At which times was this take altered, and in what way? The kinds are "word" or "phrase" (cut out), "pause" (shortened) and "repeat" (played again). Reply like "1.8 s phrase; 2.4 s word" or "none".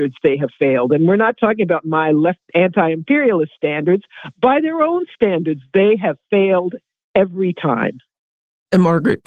2.4 s word